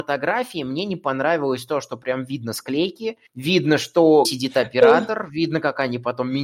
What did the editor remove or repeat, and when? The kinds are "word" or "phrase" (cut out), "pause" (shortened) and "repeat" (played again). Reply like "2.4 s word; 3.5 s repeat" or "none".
3.3 s pause; 4.2 s word